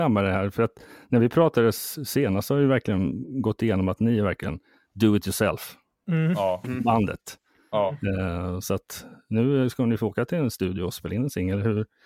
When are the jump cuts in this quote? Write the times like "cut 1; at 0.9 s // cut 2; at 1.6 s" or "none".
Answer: none